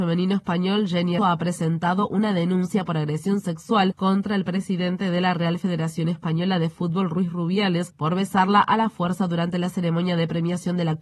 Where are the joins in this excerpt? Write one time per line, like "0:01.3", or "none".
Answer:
0:01.2